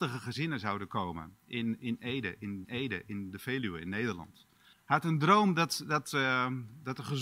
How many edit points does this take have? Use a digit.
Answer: 2